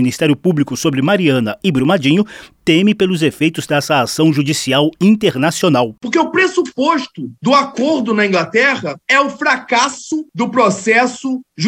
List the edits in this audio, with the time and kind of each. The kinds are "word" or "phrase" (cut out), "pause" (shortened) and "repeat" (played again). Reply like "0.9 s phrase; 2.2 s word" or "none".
none